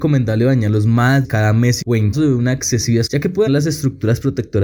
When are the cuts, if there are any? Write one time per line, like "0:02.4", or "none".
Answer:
0:01.2
0:01.8
0:02.1
0:03.1
0:03.5